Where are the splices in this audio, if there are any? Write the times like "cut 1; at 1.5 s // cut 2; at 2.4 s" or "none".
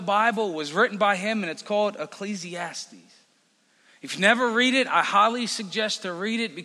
none